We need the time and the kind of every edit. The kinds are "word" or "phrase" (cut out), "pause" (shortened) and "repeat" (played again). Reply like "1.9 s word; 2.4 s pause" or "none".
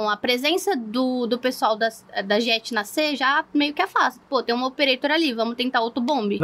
none